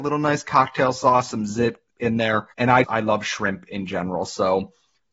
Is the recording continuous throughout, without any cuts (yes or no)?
no